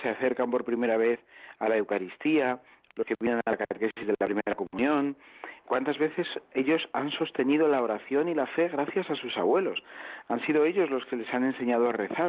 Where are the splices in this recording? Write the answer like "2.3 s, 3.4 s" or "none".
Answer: 5.6 s

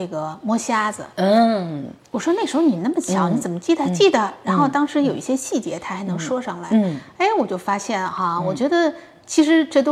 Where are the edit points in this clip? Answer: none

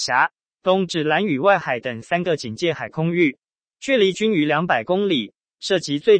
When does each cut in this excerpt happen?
none

